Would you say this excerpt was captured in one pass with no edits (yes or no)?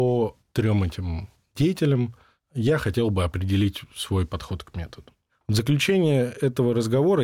yes